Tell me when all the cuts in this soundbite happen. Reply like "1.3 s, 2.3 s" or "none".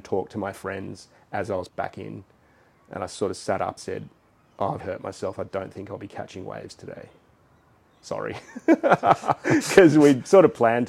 1.7 s, 3.8 s, 4.8 s